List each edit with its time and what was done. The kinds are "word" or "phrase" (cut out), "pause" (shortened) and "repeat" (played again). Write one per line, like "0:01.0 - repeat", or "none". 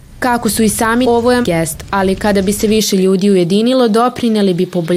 0:01.0 - word
0:01.4 - word